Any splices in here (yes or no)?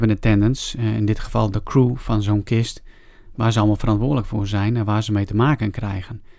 no